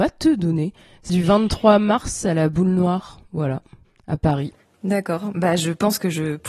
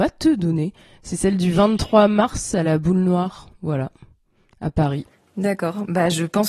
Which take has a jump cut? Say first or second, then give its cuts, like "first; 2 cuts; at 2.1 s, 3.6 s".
first; 2 cuts; at 1.1 s, 3.8 s